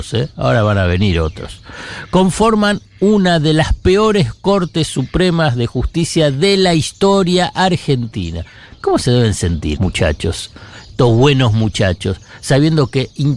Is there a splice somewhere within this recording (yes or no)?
yes